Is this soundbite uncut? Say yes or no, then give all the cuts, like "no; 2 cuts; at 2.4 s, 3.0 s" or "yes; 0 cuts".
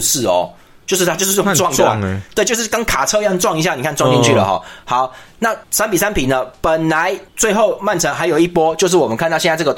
no; 2 cuts; at 5.6 s, 7.3 s